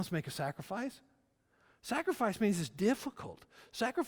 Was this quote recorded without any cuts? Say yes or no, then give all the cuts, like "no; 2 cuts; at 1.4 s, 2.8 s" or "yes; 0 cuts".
yes; 0 cuts